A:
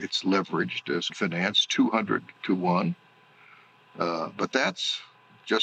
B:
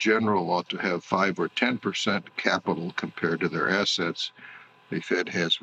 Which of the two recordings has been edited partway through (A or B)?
A